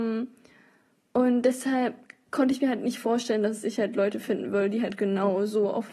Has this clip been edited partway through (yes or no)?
no